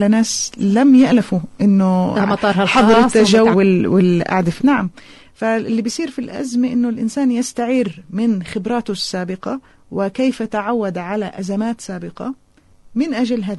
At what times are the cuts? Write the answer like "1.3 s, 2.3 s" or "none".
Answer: 2.1 s, 3.5 s, 4.6 s, 9.7 s